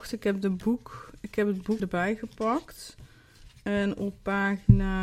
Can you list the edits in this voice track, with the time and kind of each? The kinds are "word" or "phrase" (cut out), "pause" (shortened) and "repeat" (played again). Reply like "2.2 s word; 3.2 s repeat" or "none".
1.8 s word